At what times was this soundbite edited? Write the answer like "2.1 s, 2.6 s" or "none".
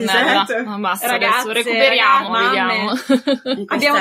2.3 s